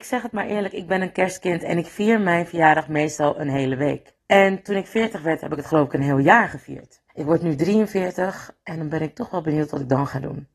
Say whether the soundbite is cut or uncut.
cut